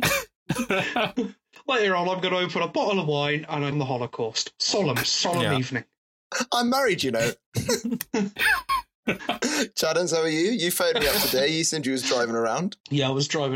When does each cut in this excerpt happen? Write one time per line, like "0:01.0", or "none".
0:03.7